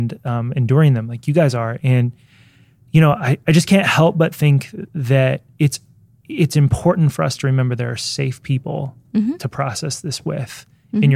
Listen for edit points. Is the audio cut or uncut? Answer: uncut